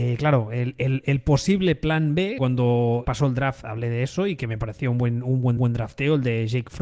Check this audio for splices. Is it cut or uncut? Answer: cut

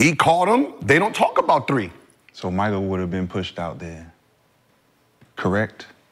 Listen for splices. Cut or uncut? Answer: uncut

